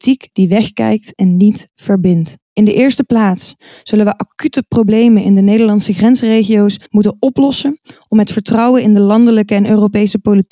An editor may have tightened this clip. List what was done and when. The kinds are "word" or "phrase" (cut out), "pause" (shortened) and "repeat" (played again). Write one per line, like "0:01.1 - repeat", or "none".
0:02.4 - pause
0:06.9 - pause